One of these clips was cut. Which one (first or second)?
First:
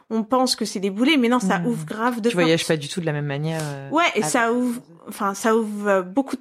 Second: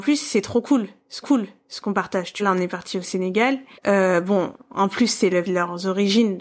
second